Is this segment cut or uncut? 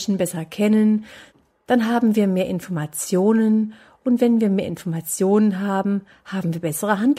uncut